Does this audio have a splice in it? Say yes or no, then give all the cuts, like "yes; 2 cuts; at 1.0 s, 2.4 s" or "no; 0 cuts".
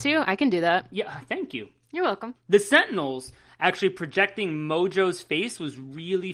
no; 0 cuts